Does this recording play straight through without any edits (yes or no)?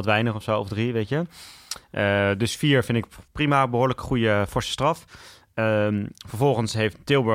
no